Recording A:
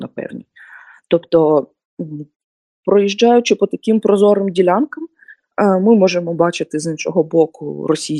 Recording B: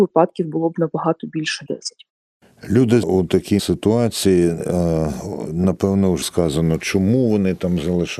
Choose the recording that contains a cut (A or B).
B